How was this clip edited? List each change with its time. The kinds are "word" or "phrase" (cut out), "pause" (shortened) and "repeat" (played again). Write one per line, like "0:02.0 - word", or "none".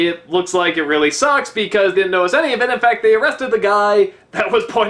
0:01.9 - word